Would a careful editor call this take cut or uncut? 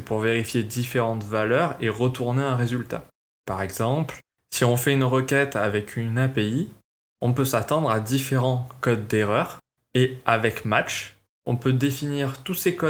uncut